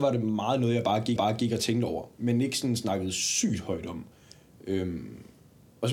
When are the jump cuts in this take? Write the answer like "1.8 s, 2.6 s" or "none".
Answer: 1.2 s